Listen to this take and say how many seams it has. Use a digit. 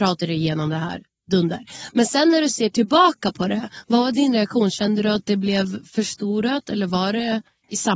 0